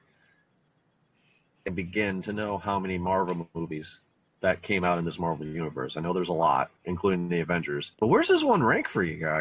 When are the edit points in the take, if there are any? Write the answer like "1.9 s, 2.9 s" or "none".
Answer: 6.8 s, 7.9 s